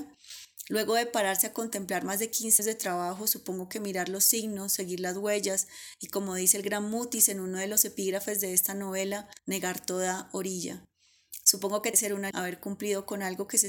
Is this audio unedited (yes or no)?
no